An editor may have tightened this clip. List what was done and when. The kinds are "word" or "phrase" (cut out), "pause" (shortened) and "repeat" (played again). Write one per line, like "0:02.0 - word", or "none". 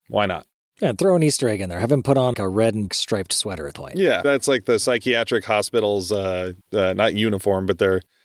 0:02.3 - word
0:02.9 - word
0:03.7 - word
0:04.2 - word
0:06.6 - pause